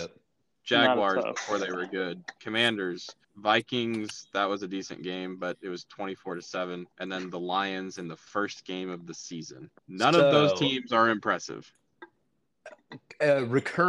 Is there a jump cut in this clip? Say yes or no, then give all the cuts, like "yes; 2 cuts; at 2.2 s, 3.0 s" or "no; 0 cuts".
yes; 3 cuts; at 3.2 s, 6.9 s, 9.8 s